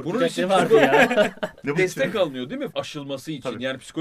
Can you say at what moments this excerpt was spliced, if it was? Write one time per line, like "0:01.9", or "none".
0:01.7
0:02.7